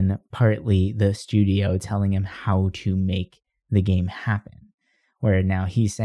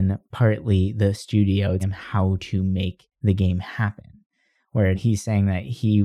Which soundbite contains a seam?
second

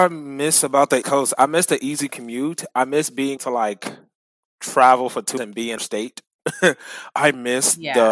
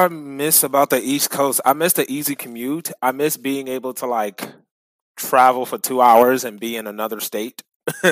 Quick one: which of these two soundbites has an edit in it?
first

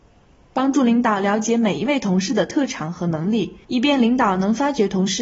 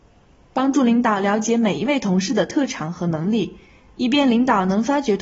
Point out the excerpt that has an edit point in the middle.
first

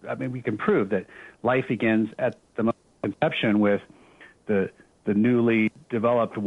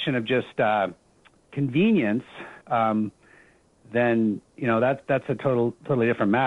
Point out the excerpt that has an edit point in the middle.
second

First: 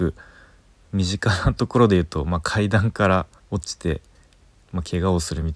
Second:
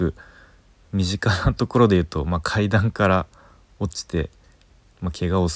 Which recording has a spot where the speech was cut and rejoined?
first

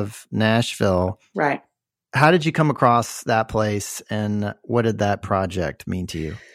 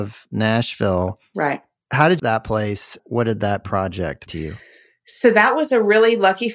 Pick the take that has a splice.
second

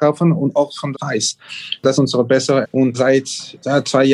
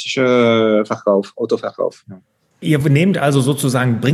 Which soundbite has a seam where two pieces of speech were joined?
first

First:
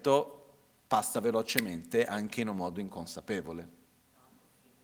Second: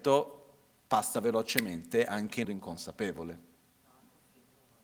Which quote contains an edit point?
second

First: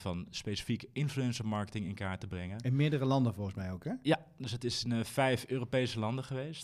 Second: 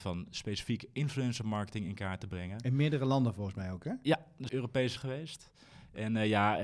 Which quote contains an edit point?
second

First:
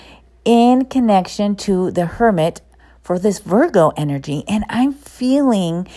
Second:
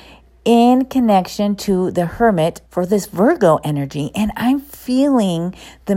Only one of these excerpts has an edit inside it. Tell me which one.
second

